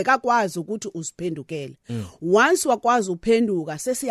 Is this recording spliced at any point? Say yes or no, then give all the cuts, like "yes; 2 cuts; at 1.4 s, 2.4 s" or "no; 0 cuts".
no; 0 cuts